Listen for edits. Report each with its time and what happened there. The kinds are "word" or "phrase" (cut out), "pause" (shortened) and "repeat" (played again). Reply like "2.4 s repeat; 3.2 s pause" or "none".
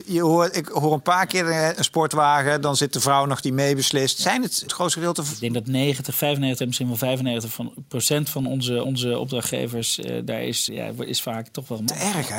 3.4 s word; 4.7 s word; 6.6 s word; 8.8 s repeat; 10.7 s word